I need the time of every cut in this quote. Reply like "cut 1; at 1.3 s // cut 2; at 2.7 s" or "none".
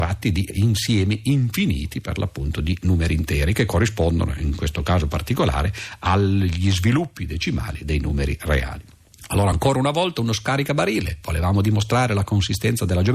none